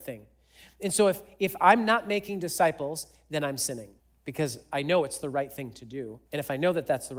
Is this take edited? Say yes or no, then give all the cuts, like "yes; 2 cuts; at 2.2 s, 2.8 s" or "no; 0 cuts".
yes; 2 cuts; at 4.0 s, 6.2 s